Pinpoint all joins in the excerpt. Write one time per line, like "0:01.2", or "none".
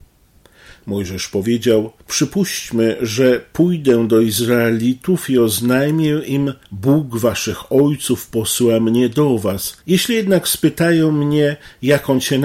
0:02.0
0:06.6
0:09.8